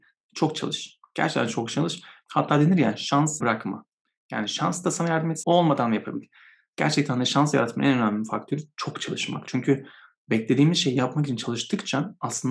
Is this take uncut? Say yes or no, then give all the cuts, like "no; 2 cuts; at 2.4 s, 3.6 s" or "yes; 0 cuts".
no; 2 cuts; at 3.4 s, 5.4 s